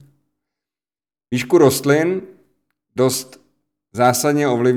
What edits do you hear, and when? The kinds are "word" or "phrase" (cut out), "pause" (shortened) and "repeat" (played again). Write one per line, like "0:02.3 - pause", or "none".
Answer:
none